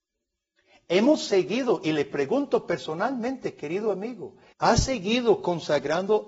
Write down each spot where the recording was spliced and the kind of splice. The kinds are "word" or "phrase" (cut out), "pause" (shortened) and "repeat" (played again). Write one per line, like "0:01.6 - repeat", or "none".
0:04.5 - pause